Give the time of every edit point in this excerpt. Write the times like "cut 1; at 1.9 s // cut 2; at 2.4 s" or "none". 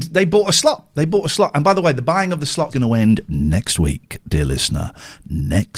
cut 1; at 2.7 s